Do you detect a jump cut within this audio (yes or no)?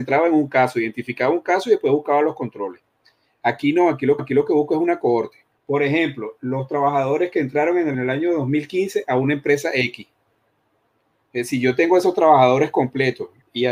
yes